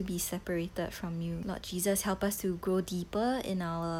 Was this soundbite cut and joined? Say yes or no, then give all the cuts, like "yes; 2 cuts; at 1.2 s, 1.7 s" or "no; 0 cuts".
no; 0 cuts